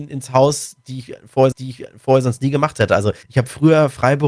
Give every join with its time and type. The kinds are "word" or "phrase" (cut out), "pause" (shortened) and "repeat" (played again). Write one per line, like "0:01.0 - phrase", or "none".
0:01.5 - repeat
0:03.2 - pause